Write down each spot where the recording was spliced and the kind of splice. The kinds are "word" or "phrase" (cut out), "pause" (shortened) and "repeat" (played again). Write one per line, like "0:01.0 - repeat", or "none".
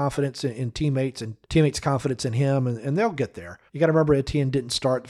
0:01.4 - pause
0:03.7 - pause